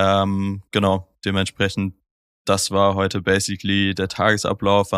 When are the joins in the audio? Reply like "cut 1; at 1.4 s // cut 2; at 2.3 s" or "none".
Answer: none

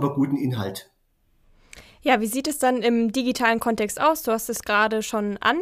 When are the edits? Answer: none

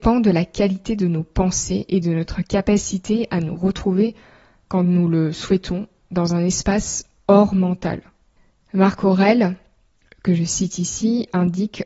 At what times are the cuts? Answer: none

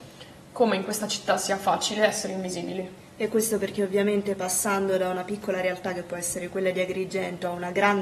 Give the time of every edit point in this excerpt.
cut 1; at 3.0 s

